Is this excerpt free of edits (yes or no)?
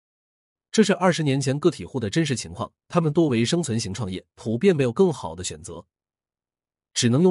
no